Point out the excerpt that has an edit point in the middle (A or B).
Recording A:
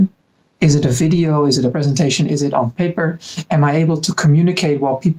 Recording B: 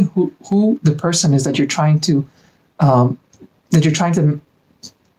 A